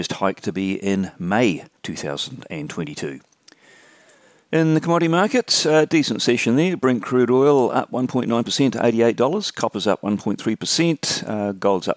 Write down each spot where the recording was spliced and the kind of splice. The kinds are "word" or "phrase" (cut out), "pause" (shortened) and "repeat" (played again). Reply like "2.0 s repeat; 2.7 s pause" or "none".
1.8 s pause